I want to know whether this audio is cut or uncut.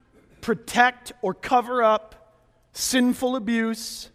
uncut